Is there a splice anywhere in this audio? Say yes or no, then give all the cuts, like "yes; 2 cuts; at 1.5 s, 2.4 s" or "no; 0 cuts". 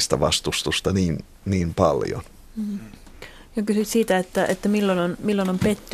no; 0 cuts